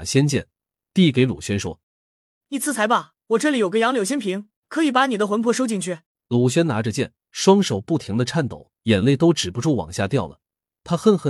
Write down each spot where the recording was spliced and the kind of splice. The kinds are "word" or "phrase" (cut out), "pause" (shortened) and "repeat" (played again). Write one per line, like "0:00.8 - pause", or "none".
0:01.8 - pause
0:03.2 - pause
0:04.6 - pause
0:06.1 - pause
0:07.2 - pause
0:08.8 - pause